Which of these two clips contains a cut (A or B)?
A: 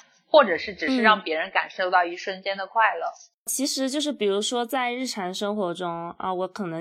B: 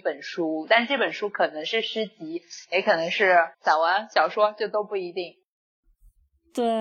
B